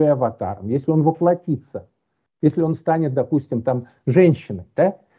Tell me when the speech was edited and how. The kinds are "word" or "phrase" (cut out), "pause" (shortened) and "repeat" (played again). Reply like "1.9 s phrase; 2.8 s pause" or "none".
none